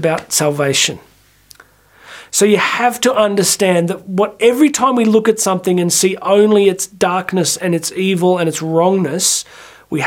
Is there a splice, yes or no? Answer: no